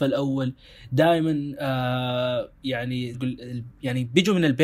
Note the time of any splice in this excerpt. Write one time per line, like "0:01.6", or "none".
0:03.1